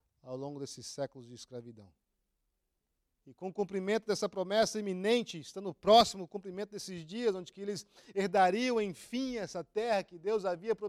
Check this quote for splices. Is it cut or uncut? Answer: uncut